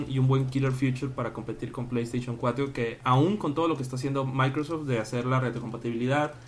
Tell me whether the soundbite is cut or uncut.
uncut